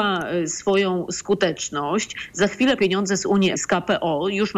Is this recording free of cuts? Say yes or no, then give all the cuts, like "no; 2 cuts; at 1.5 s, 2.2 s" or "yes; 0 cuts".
no; 2 cuts; at 2.8 s, 3.5 s